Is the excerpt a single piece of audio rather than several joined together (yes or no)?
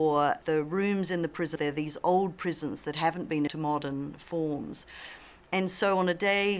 no